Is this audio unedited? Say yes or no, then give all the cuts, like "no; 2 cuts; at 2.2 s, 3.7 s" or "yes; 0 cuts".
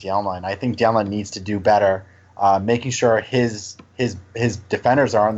yes; 0 cuts